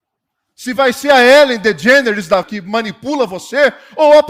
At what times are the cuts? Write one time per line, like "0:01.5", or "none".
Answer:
0:02.4